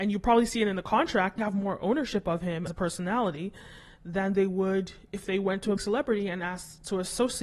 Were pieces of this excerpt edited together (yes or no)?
yes